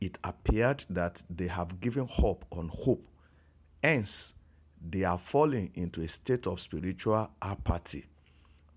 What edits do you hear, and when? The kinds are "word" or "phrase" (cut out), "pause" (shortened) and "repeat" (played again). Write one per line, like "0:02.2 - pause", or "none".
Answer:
none